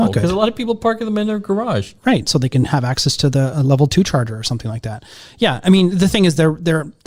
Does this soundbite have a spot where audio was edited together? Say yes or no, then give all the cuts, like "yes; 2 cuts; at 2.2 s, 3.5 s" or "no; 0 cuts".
no; 0 cuts